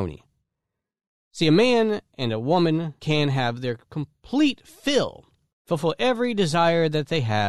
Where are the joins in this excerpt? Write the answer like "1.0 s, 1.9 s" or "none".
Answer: 3.0 s, 5.5 s

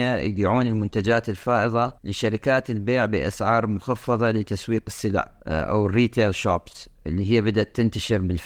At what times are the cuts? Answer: 2.0 s, 5.4 s

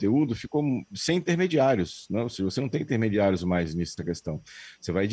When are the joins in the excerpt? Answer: 4.0 s

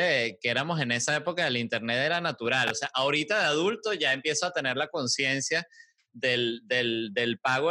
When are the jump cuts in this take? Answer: none

